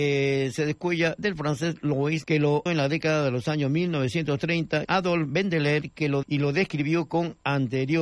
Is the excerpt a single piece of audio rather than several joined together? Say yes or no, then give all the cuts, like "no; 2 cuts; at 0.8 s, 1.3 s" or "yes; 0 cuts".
no; 4 cuts; at 2.2 s, 2.7 s, 4.8 s, 6.2 s